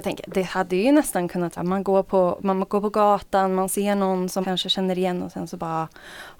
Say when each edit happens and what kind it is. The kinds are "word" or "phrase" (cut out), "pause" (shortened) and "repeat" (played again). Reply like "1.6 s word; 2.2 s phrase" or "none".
1.6 s word; 4.4 s word

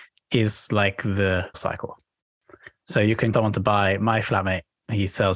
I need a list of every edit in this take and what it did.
1.5 s word; 3.3 s word

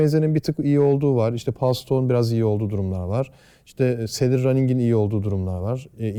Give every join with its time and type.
none

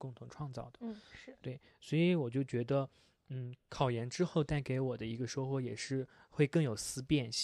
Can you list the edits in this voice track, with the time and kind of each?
none

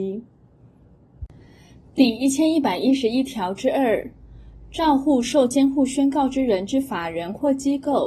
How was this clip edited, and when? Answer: none

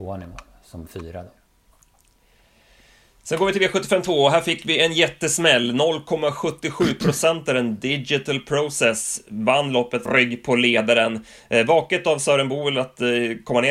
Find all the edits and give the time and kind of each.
10.1 s word

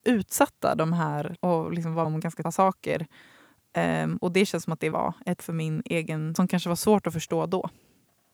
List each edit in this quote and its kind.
1.4 s word; 2.0 s word; 2.4 s word; 4.9 s word; 5.4 s word; 6.4 s word

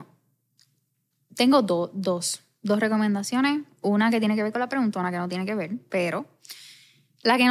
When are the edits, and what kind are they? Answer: none

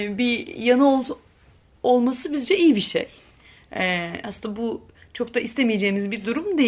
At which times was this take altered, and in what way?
none

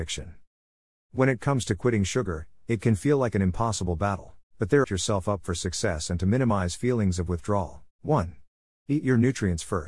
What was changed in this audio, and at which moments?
4.5 s pause; 4.8 s phrase; 7.9 s pause

